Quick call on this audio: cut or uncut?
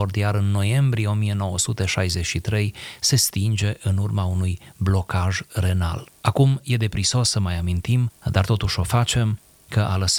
cut